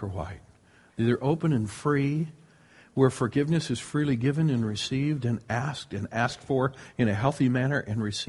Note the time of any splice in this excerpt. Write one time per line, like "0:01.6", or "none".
none